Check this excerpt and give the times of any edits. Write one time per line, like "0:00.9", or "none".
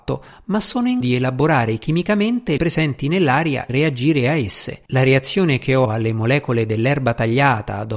0:01.0
0:02.6
0:03.7
0:04.9
0:05.8